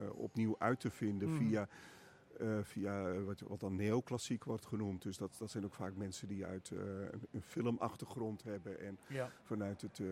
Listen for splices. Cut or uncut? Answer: uncut